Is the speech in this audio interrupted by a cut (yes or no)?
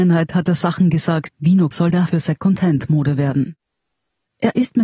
yes